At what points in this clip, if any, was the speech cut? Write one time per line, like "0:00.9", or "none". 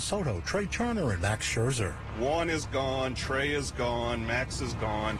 none

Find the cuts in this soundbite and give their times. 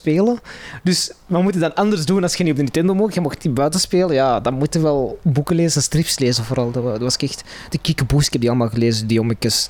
none

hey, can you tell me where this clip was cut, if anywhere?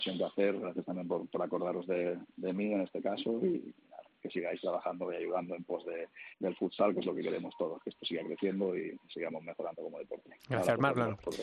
0:06.3

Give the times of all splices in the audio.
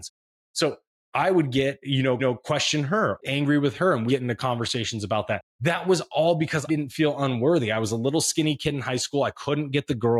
0:02.2
0:03.2
0:04.1
0:05.5
0:06.7

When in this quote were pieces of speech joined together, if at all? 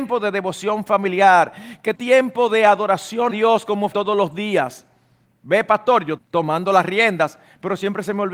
0:01.9
0:03.3
0:03.9
0:05.2
0:06.2

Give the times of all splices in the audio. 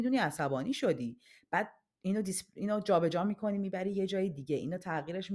none

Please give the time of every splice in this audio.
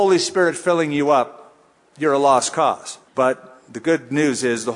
0:03.1

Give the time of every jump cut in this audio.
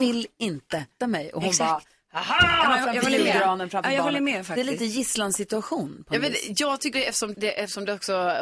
0:01.0
0:06.9
0:07.3

